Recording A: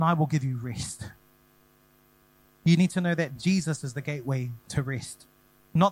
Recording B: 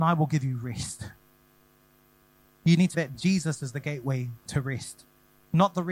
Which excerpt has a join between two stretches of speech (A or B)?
B